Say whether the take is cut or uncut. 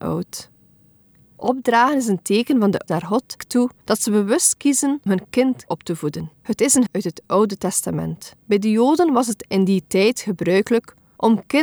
cut